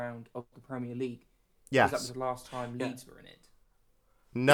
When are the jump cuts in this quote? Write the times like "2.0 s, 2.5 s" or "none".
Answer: none